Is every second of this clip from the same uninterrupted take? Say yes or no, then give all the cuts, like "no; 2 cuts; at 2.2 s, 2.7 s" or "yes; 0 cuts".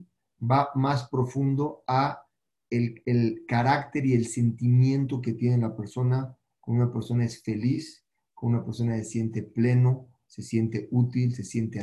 yes; 0 cuts